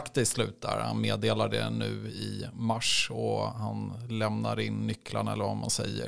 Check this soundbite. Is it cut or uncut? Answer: uncut